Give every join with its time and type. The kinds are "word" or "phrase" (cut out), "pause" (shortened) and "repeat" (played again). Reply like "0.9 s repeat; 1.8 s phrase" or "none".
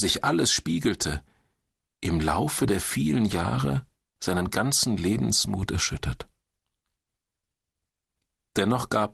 none